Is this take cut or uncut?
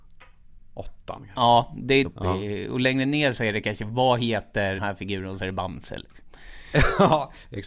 cut